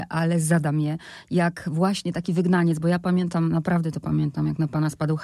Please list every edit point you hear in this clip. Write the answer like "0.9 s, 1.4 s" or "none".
none